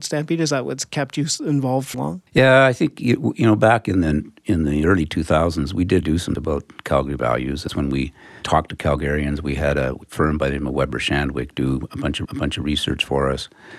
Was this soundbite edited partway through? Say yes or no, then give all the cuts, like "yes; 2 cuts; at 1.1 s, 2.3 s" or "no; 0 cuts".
yes; 6 cuts; at 1.9 s, 2.3 s, 6.0 s, 6.4 s, 7.7 s, 12.3 s